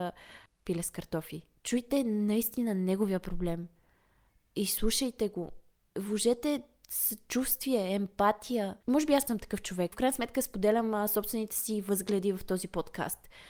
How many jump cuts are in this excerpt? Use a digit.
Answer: 4